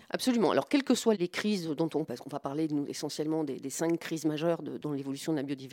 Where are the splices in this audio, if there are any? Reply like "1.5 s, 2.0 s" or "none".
2.1 s